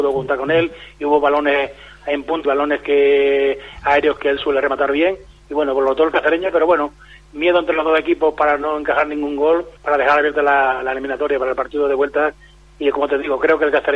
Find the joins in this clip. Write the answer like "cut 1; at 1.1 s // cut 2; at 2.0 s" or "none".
cut 1; at 2.4 s // cut 2; at 9.8 s